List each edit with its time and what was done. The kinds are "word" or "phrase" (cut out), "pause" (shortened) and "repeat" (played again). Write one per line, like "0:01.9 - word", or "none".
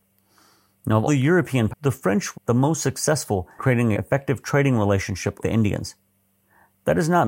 0:01.1 - word
0:01.7 - word
0:02.3 - word
0:03.6 - word
0:03.9 - word
0:05.4 - word